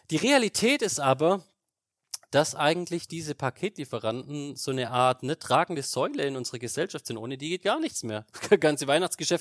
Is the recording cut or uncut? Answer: uncut